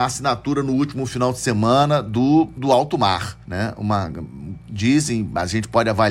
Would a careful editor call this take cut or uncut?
cut